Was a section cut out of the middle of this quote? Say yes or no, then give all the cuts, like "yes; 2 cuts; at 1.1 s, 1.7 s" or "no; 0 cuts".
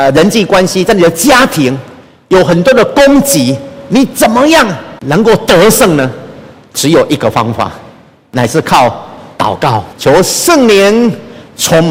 yes; 2 cuts; at 5.0 s, 9.9 s